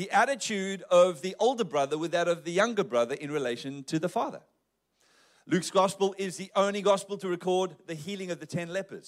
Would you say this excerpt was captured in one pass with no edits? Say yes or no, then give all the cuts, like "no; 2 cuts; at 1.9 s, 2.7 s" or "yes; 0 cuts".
yes; 0 cuts